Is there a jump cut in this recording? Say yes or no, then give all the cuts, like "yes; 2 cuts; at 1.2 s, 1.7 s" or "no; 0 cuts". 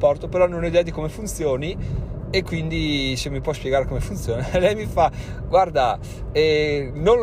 no; 0 cuts